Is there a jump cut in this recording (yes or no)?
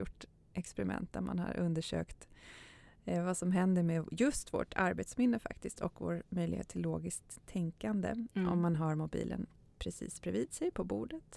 yes